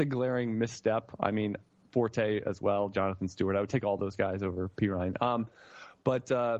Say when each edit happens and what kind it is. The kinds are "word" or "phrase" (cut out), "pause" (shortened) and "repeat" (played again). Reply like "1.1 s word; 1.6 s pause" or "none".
none